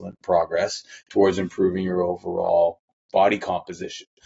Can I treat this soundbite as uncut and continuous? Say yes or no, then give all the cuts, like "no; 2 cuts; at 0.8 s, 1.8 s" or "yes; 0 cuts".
yes; 0 cuts